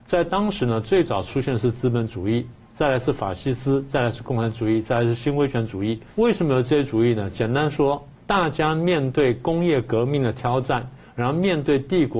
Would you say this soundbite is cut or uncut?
cut